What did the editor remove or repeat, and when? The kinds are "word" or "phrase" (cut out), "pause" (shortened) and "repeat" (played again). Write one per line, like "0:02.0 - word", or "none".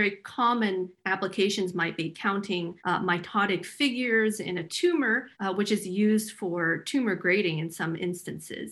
0:02.8 - pause
0:05.3 - pause